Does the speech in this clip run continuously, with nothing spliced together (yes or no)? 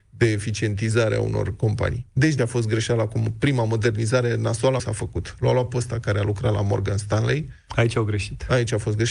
no